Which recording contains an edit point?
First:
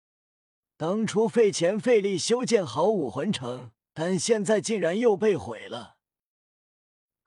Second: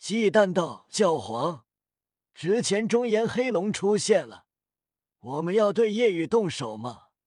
first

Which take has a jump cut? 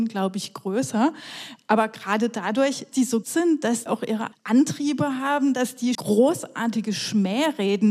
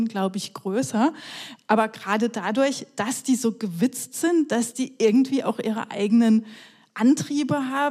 first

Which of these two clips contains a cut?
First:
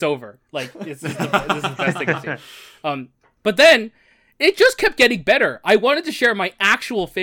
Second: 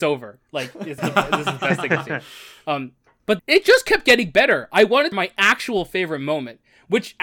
second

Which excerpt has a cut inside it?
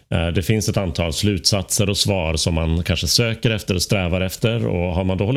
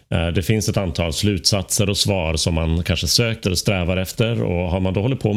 second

